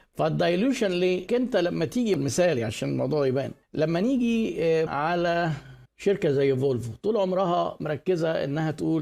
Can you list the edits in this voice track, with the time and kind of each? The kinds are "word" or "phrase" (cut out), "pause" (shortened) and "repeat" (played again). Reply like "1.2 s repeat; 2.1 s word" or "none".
1.3 s word; 2.2 s word; 3.6 s pause; 4.9 s word; 5.9 s pause